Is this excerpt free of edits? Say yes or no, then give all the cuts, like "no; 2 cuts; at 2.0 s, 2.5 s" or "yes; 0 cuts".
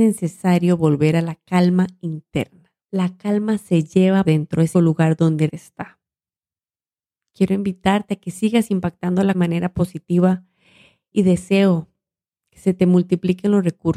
no; 6 cuts; at 2.8 s, 4.2 s, 4.7 s, 5.5 s, 9.3 s, 11.1 s